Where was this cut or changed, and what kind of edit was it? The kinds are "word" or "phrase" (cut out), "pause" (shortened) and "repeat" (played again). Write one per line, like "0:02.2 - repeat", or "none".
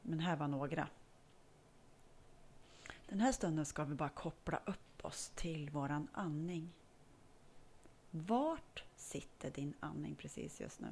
none